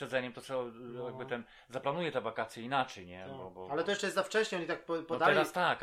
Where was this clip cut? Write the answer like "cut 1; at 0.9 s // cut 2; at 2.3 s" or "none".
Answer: none